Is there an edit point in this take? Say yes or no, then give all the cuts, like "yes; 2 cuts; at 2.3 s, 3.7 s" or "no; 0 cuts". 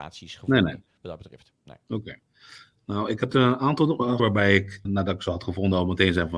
yes; 2 cuts; at 4.2 s, 4.8 s